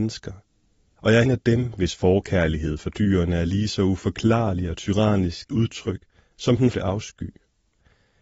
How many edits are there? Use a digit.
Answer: 3